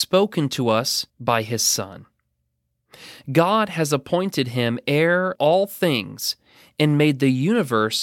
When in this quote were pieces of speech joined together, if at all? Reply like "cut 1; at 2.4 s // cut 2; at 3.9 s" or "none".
cut 1; at 1.1 s // cut 2; at 5.4 s